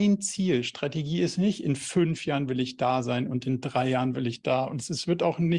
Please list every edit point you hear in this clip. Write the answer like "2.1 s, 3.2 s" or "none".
none